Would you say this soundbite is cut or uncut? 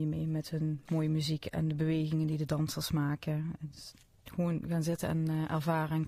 uncut